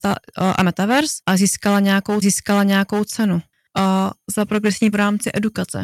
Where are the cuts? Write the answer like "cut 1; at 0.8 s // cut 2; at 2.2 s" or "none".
cut 1; at 1.2 s // cut 2; at 2.2 s // cut 3; at 4.9 s